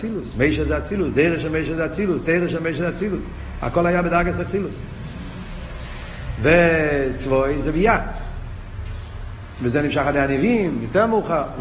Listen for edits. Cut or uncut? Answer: uncut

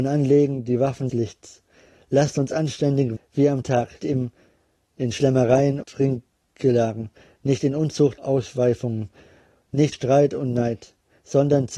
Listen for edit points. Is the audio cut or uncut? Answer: cut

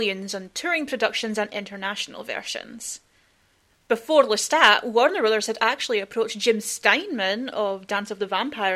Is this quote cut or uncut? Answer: uncut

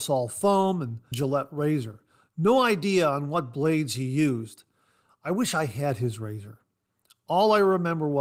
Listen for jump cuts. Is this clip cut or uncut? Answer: cut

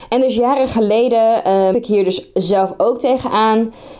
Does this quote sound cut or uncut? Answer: cut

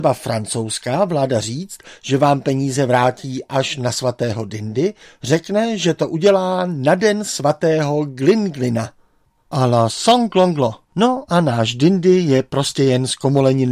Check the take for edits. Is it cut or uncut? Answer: cut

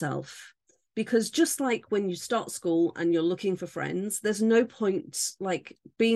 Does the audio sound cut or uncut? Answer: uncut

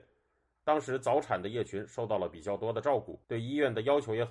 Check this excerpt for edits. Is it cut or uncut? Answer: cut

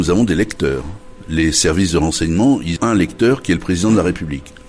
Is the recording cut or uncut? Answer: cut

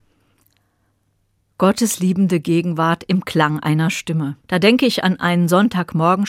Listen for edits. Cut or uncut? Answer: cut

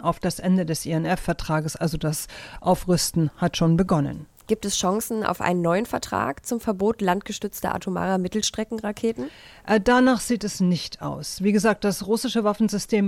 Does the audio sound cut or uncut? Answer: uncut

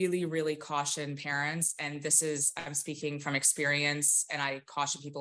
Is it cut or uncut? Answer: uncut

